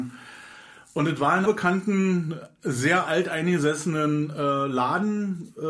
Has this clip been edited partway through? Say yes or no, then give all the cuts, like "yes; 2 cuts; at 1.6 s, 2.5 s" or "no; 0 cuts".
yes; 1 cut; at 1.5 s